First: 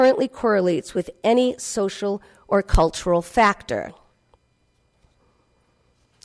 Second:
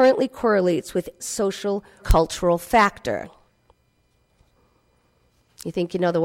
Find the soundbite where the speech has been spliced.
second; 2 cuts; at 1.2 s, 2.0 s

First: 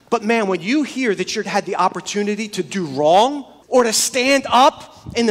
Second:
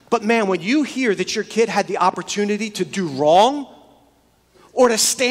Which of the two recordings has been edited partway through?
first; 2 cuts; at 1.4 s, 3.6 s

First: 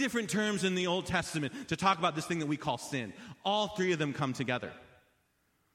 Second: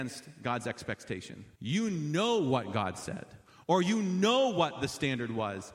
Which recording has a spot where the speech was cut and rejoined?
second; 1 cut; at 1.6 s

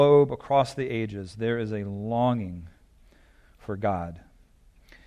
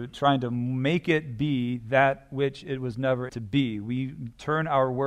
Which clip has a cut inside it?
second; 1 cut; at 3.3 s

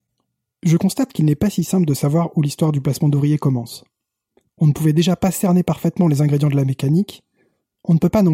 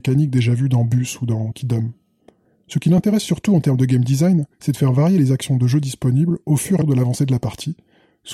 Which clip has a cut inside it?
second; 2 cuts; at 4.5 s, 6.8 s

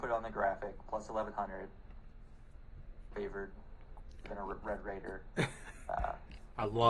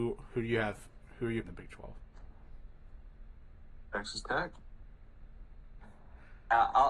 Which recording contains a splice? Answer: second; 1 cut; at 1.4 s

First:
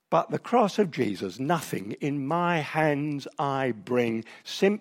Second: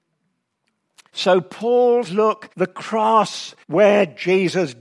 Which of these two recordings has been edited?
second; 3 cuts; at 2.1 s, 2.5 s, 3.6 s

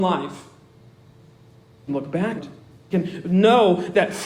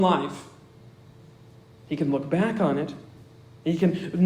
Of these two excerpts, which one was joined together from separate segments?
first; 3 cuts; at 1.9 s, 2.4 s, 2.9 s

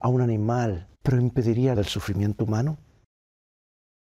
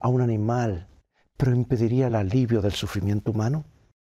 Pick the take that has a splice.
first; 2 cuts; at 1.0 s, 1.8 s

